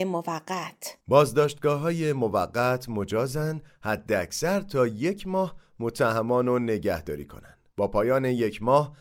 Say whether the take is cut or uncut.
cut